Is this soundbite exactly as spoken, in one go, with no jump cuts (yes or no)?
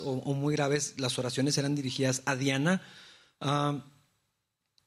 yes